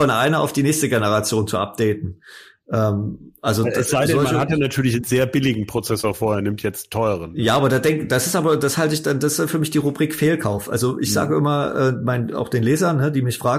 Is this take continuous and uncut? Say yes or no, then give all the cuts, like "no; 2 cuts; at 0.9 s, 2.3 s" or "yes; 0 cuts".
yes; 0 cuts